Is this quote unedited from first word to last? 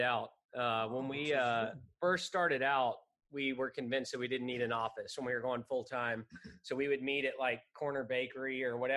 yes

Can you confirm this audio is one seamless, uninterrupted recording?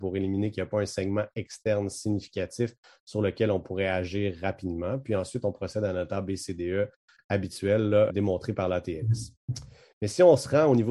no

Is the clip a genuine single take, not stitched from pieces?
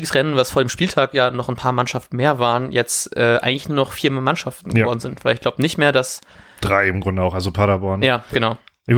yes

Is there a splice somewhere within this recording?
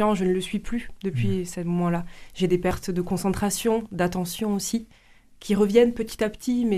no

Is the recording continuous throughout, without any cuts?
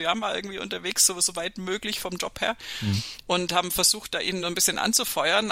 yes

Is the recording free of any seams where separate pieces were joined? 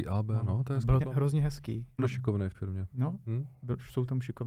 no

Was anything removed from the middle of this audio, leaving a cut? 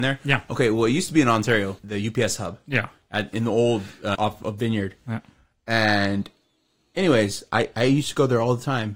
yes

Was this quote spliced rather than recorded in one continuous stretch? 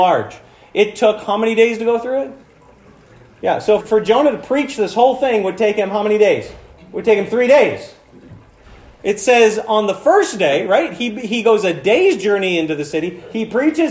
yes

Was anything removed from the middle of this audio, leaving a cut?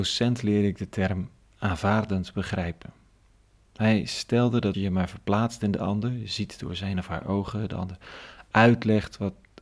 yes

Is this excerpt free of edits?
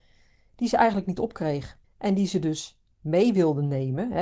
no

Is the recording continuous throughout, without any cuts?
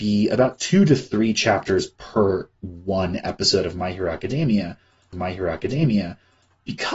no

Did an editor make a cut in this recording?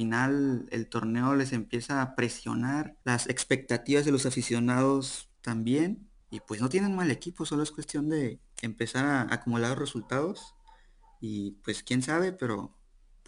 yes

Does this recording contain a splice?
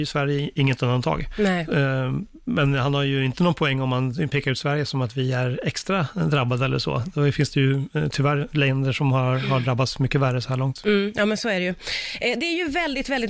no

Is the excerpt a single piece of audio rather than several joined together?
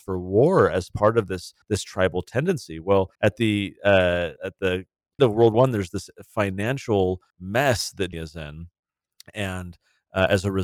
no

